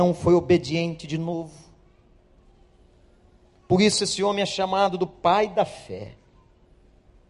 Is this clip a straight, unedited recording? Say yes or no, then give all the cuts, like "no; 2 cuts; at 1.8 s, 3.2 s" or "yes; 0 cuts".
yes; 0 cuts